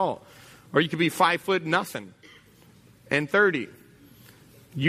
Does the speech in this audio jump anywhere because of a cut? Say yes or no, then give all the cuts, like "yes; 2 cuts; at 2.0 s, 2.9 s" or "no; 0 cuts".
no; 0 cuts